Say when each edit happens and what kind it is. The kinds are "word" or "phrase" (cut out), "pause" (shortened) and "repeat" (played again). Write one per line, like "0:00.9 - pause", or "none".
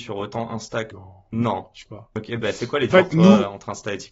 0:00.9 - word
0:01.9 - word
0:02.9 - word